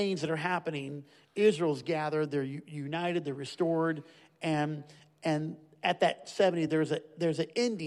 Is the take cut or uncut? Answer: uncut